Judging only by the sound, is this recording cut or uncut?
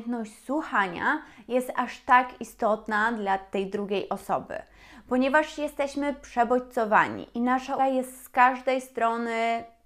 cut